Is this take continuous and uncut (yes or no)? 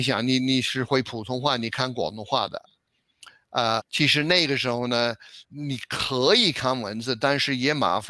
no